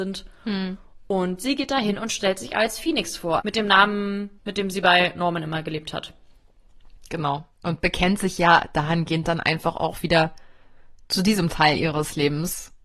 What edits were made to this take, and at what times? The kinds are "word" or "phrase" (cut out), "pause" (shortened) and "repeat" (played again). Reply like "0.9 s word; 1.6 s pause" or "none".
3.4 s word; 4.4 s pause